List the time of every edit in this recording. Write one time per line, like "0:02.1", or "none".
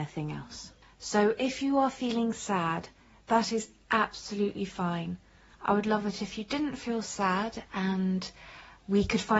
none